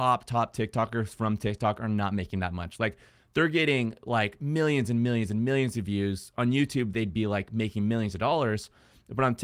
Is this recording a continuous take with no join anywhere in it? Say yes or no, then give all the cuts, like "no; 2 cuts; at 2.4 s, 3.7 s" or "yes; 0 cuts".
yes; 0 cuts